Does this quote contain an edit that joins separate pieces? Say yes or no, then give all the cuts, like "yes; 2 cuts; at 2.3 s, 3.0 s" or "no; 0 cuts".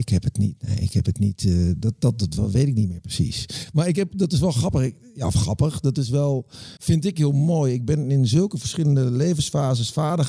yes; 1 cut; at 6.8 s